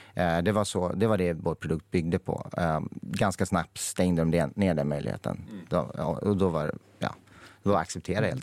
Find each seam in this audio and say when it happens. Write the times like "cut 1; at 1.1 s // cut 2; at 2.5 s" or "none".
none